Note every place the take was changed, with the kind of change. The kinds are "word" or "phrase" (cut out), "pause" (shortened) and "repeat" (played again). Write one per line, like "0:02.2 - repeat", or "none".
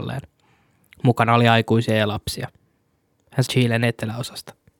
0:03.5 - phrase

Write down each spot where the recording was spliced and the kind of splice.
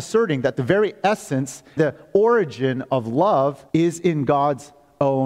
0:01.8 - word
0:03.7 - pause

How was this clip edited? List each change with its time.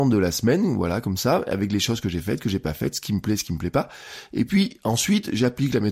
none

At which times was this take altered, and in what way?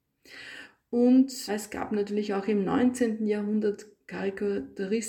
0:01.5 - word

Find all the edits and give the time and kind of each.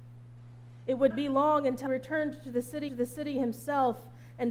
0:01.1 - word
0:01.9 - word
0:02.9 - repeat

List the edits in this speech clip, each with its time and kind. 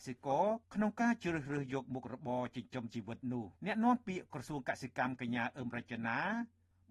0:03.6 - pause

